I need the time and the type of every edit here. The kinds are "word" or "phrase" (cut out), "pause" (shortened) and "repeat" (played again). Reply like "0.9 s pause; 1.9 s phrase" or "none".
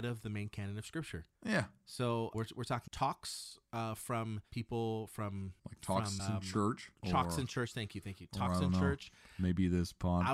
1.3 s pause; 2.3 s word; 2.9 s word; 5.6 s pause; 6.2 s word; 6.9 s pause